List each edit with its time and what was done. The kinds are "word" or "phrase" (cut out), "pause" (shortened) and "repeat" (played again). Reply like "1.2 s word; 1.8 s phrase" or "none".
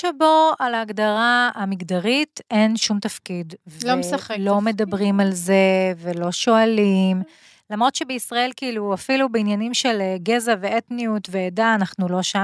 none